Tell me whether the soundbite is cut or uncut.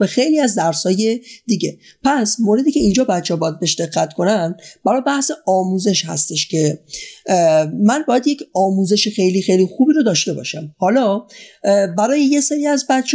uncut